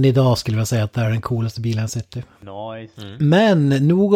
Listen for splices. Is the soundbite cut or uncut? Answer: uncut